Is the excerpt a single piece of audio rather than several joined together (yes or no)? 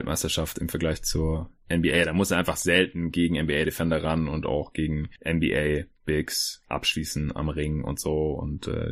yes